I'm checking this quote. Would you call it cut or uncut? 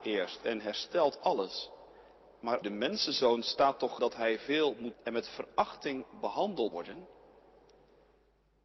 cut